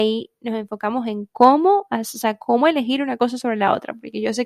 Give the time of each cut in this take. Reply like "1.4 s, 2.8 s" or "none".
none